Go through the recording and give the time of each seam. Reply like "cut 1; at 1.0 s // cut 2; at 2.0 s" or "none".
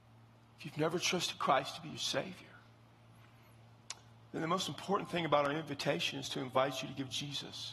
none